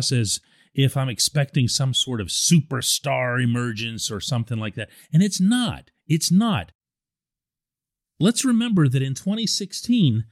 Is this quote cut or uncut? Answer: uncut